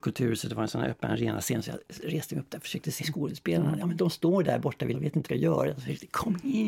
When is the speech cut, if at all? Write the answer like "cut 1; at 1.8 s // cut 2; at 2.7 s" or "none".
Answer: cut 1; at 3.0 s // cut 2; at 4.9 s // cut 3; at 5.2 s